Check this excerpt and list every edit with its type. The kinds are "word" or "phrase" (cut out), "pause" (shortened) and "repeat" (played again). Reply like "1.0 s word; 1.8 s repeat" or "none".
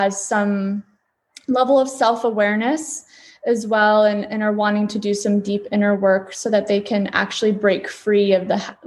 none